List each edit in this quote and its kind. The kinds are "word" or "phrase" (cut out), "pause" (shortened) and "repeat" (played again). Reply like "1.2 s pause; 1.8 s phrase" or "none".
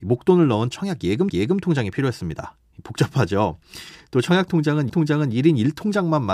1.3 s repeat; 4.9 s repeat